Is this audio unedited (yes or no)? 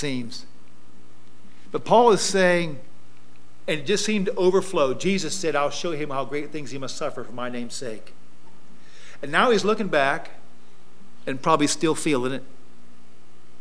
yes